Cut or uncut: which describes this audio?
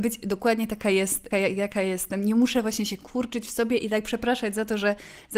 cut